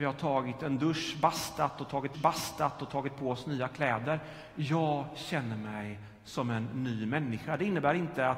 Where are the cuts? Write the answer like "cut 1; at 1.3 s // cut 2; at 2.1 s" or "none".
cut 1; at 2.1 s